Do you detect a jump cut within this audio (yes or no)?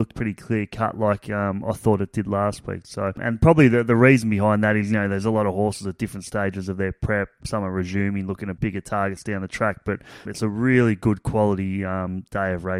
yes